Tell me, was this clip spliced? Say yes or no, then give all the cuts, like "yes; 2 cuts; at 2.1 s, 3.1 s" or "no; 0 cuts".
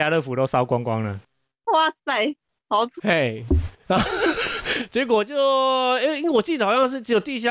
yes; 1 cut; at 3.0 s